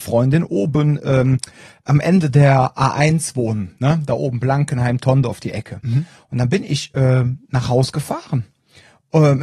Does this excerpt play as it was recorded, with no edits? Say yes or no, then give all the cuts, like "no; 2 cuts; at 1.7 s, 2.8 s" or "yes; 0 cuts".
yes; 0 cuts